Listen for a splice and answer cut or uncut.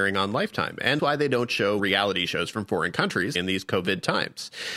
cut